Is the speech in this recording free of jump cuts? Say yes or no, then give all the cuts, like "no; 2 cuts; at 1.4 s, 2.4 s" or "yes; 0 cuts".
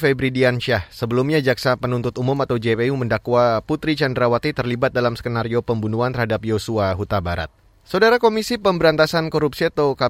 yes; 0 cuts